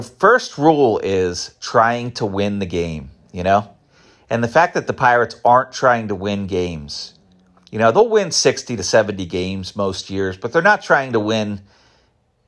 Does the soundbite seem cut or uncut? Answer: uncut